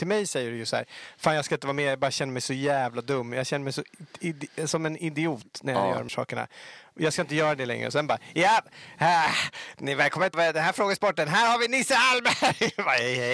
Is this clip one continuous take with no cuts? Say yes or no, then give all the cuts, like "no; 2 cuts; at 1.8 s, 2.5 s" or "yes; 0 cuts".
no; 2 cuts; at 6.1 s, 10.3 s